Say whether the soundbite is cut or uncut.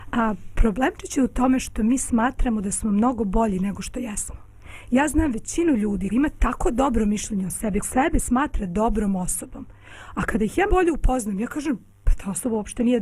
cut